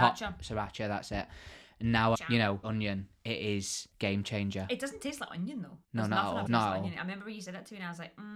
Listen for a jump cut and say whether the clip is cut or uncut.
cut